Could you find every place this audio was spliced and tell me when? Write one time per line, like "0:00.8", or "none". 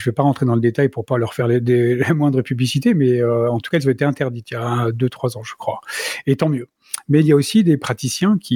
none

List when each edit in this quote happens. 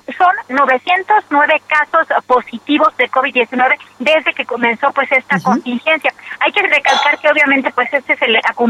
0:03.9

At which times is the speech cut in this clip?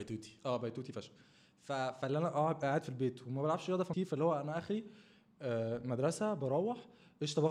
0:03.9

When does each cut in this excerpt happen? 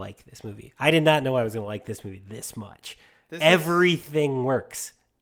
none

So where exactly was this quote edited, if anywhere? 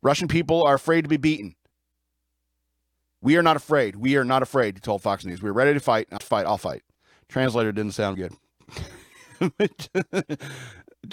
0:06.2
0:08.1

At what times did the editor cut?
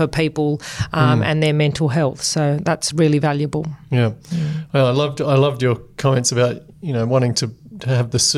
none

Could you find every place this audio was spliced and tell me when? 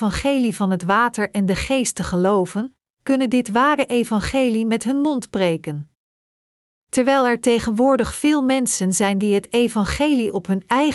none

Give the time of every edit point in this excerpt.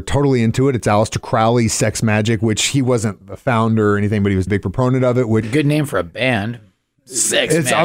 0:03.2
0:04.5
0:05.4

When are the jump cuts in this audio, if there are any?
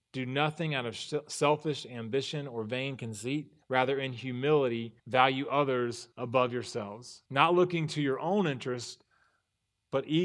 0:03.6
0:05.0
0:06.1
0:07.3

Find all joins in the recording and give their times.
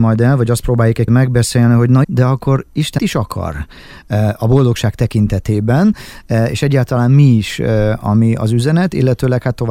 0:01.1
0:02.0
0:03.0
0:08.0

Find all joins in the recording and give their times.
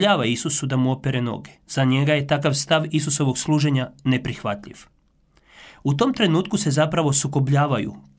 0:01.6

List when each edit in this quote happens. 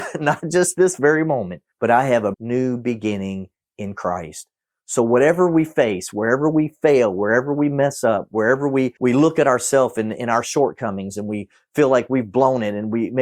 0:01.7
0:02.3
0:09.0

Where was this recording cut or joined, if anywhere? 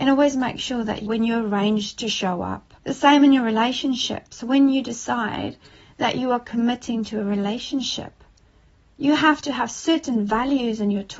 0:01.1
0:02.8

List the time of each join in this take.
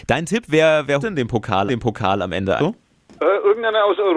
0:01.0
0:01.7
0:02.6

